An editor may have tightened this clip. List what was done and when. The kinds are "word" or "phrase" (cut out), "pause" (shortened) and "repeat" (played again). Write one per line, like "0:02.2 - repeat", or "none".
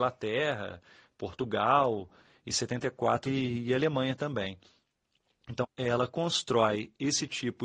0:03.3 - word
0:05.6 - phrase